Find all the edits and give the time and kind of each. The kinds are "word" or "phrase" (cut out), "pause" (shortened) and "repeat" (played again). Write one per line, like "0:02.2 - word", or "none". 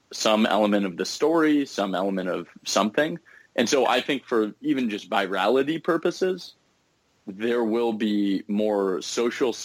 none